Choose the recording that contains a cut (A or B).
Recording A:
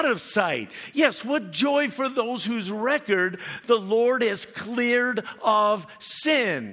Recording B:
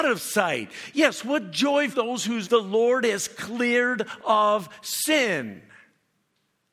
B